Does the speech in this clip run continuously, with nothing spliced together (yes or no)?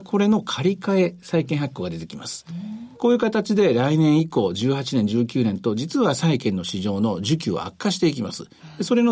no